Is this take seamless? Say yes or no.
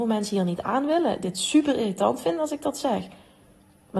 yes